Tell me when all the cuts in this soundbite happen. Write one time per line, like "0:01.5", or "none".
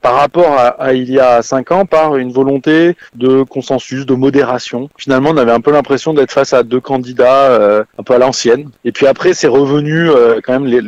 0:03.1
0:07.9